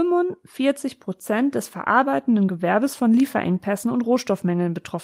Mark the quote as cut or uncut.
uncut